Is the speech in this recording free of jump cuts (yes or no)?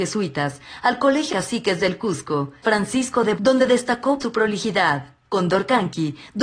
no